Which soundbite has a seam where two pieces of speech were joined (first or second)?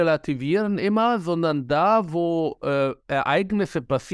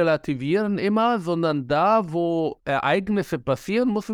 second